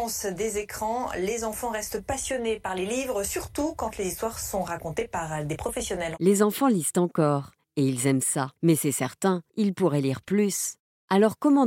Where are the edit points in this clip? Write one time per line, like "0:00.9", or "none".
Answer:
0:08.6
0:09.5